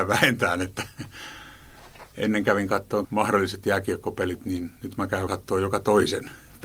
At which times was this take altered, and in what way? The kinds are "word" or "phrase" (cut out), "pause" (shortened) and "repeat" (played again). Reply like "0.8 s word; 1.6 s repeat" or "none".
3.0 s word; 5.3 s word